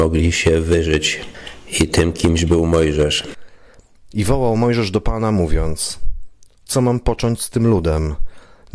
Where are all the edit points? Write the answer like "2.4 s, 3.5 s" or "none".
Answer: none

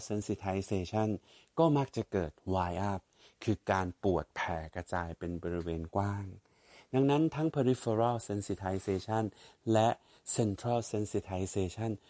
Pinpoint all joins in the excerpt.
none

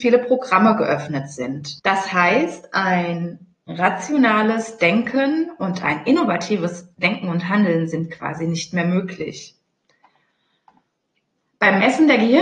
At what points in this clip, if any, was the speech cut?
1.8 s

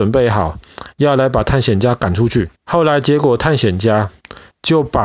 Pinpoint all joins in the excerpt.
2.6 s

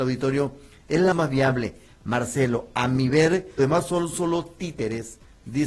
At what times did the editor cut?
1.1 s, 3.6 s

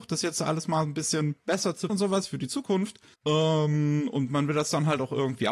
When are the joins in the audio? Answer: 1.9 s, 3.1 s

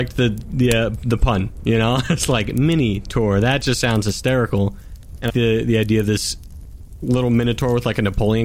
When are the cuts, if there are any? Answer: 5.3 s

